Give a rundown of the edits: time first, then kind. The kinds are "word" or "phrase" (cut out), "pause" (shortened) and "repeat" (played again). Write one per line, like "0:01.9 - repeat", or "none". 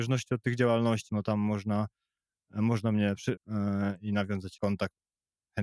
0:01.1 - word
0:03.4 - word
0:04.6 - word